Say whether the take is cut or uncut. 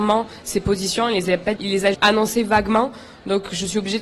cut